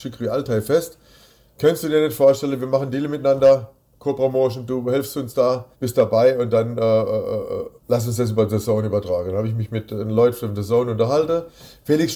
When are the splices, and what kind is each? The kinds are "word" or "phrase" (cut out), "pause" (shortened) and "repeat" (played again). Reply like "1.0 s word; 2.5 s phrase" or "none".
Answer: 5.7 s pause; 7.8 s pause